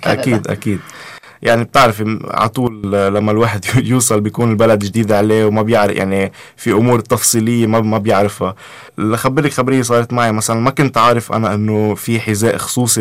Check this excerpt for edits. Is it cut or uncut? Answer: cut